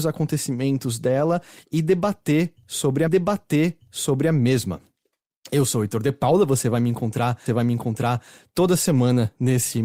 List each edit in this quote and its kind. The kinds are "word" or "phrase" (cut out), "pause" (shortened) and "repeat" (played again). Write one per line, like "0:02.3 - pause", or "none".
0:03.1 - repeat
0:07.5 - repeat